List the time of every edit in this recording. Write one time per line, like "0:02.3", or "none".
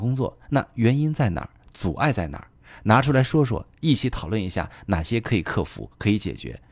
none